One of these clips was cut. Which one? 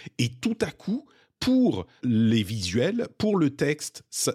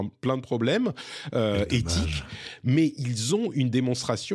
first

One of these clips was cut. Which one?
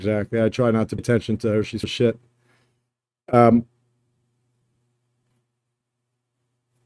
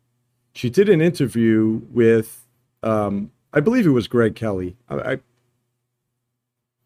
first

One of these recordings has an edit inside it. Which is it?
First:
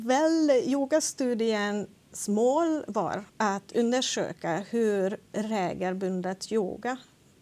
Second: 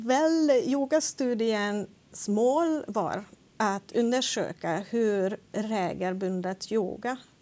first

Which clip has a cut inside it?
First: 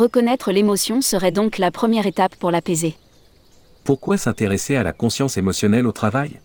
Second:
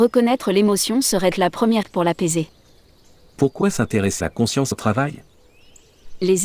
second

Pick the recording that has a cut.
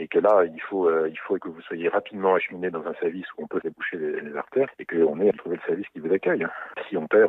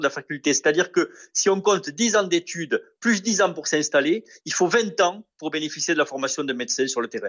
first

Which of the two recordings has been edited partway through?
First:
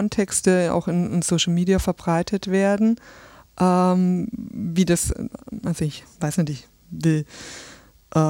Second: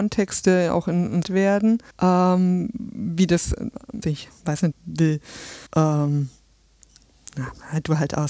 second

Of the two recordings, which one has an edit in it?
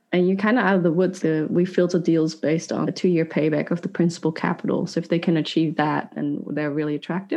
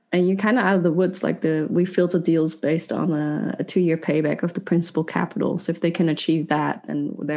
first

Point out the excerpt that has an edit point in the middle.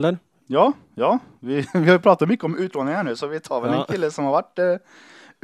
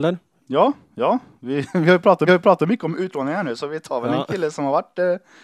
second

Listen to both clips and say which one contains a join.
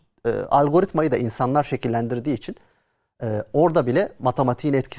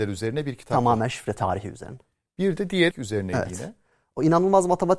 second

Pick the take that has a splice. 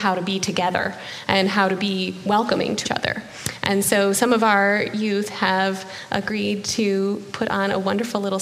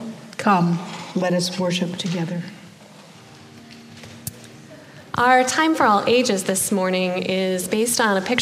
first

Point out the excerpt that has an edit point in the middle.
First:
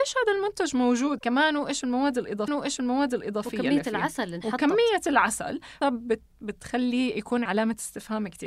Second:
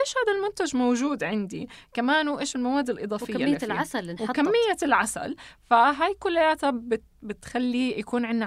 first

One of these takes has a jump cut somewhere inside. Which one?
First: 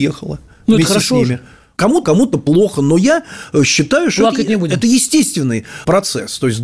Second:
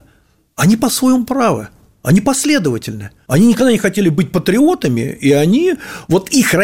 first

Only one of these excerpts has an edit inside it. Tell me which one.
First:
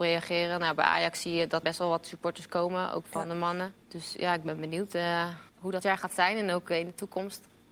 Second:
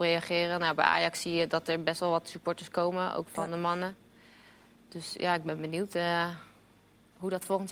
first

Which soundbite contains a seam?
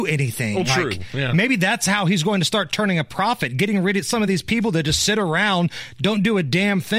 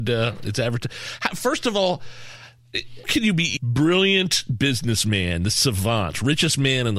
second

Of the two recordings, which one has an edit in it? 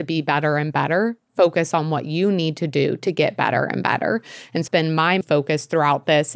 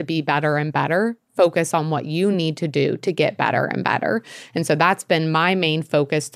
first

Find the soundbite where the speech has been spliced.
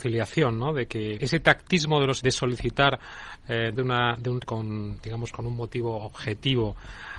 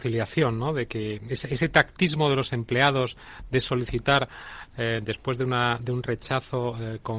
first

